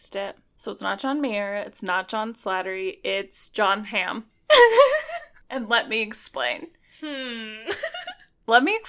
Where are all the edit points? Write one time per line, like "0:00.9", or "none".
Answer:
none